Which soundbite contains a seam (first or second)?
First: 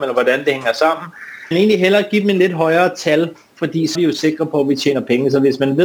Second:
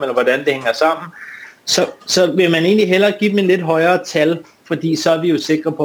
first